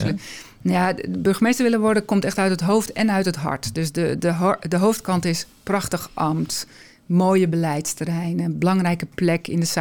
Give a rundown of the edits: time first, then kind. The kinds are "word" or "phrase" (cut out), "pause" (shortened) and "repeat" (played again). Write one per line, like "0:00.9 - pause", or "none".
none